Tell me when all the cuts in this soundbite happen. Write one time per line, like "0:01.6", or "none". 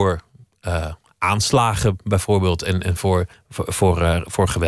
0:03.3

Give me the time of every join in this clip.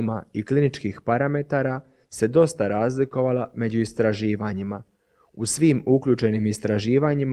none

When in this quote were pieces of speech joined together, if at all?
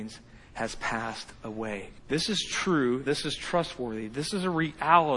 0:02.0
0:03.1

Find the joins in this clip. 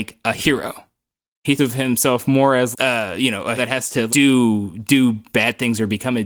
0:01.6
0:02.7
0:03.6
0:04.1

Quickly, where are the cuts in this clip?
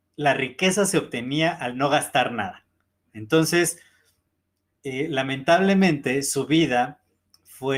none

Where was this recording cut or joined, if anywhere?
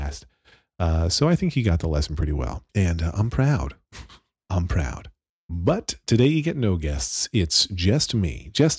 0:02.7
0:05.3

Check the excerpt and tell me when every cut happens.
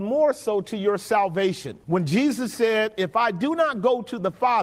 0:01.8

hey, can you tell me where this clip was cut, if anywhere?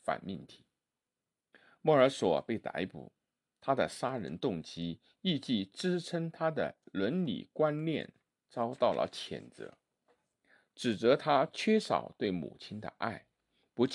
0:01.5

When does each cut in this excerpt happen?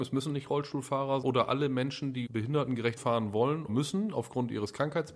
0:01.2
0:02.3
0:03.0
0:03.7

